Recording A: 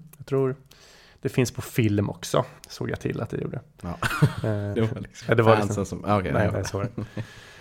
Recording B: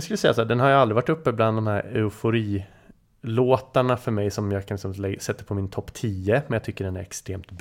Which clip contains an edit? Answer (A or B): A